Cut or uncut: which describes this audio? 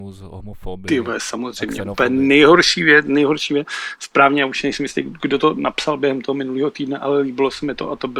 uncut